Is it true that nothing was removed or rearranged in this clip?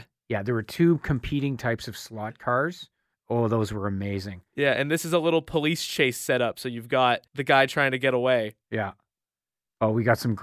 no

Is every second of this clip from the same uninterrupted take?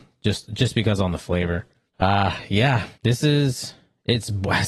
no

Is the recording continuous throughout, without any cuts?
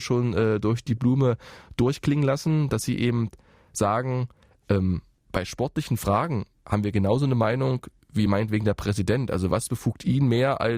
yes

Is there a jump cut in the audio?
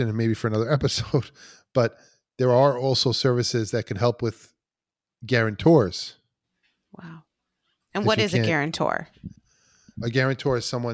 no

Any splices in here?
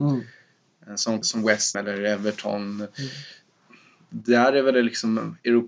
yes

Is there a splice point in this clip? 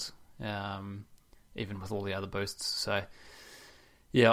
no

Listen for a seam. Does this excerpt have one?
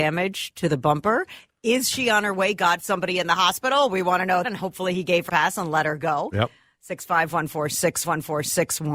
yes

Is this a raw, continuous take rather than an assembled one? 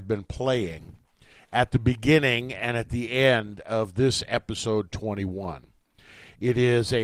yes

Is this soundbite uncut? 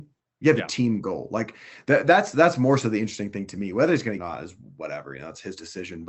no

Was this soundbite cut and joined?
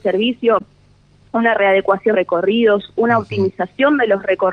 yes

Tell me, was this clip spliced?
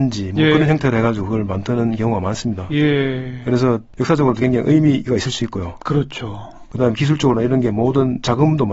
no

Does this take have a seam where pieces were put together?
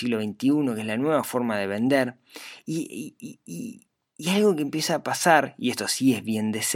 no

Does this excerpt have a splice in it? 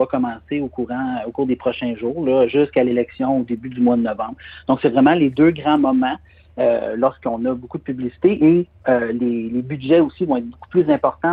no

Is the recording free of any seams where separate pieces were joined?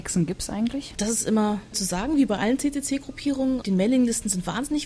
no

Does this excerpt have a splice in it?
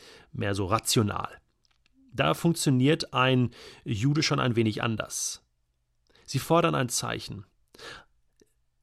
no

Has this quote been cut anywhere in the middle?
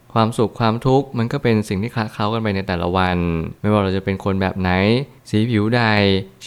yes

